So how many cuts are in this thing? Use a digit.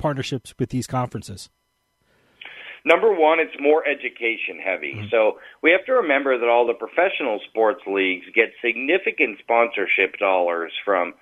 0